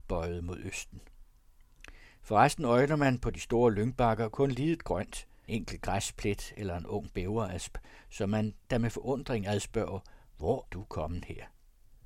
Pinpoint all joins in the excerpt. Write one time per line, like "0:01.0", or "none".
0:05.5
0:10.7